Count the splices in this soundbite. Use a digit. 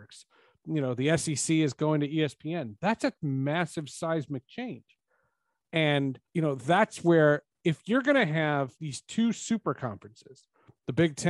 2